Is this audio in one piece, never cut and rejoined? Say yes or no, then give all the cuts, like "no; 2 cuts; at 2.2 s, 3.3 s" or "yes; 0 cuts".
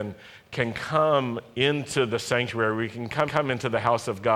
no; 1 cut; at 3.3 s